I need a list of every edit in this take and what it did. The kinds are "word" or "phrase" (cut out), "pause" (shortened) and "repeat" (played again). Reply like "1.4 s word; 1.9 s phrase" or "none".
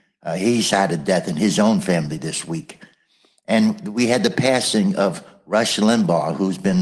none